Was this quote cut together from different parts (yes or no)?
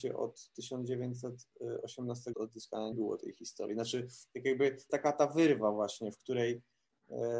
yes